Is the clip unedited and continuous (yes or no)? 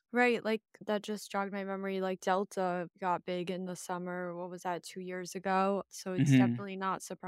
yes